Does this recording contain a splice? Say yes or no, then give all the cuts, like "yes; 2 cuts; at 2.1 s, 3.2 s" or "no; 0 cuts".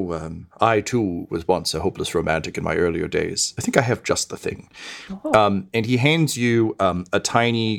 no; 0 cuts